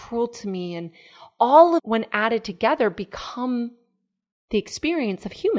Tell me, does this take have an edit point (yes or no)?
yes